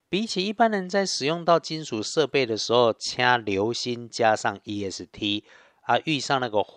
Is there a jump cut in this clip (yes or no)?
no